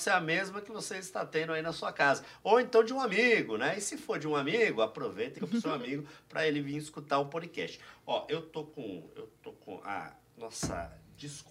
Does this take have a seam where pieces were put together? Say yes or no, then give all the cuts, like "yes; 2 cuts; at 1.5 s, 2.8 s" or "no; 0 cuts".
yes; 1 cut; at 5.4 s